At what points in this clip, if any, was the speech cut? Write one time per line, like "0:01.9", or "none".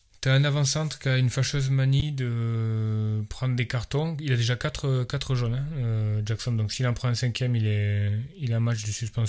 none